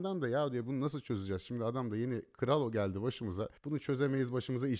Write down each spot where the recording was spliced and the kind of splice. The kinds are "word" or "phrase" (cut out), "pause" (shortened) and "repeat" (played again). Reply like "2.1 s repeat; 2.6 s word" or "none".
3.6 s pause